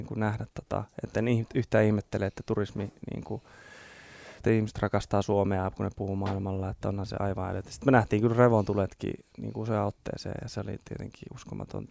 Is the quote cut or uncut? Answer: cut